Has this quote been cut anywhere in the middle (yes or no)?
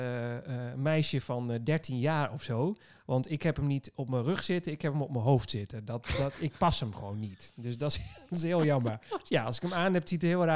no